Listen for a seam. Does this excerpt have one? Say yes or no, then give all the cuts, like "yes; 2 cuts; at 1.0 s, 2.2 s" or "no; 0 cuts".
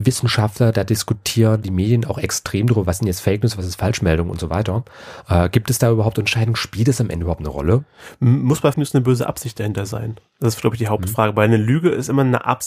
yes; 2 cuts; at 1.6 s, 8.7 s